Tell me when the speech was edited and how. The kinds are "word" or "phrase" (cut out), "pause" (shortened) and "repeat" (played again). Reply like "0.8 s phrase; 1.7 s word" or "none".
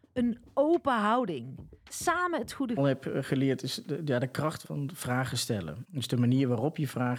2.8 s phrase